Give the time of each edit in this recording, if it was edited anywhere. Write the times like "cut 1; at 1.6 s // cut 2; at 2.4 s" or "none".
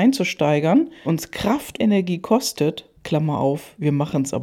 cut 1; at 1.0 s // cut 2; at 1.8 s // cut 3; at 3.0 s